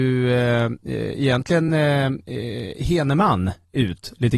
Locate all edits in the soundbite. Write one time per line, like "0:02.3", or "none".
none